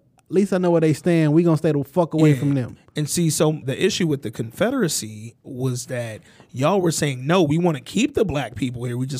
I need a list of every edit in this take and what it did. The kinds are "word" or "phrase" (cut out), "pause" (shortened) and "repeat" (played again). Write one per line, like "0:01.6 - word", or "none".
0:03.6 - word